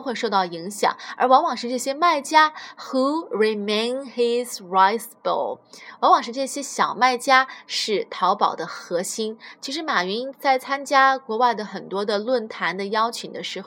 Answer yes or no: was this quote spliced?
no